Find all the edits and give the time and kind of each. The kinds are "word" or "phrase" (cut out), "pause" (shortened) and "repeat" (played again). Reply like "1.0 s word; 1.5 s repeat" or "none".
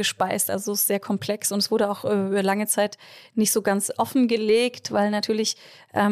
none